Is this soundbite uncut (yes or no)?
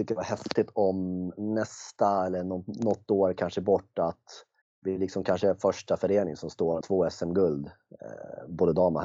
no